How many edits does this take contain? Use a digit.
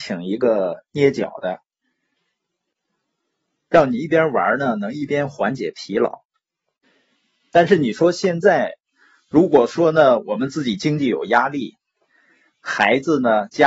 0